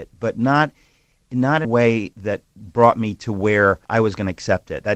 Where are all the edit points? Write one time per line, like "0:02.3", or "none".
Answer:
0:01.6
0:02.1
0:03.8